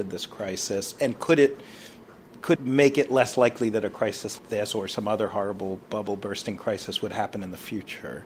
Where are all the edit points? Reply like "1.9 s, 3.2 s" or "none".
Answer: 2.6 s, 4.4 s, 5.8 s